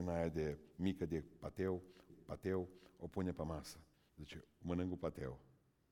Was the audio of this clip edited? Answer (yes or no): yes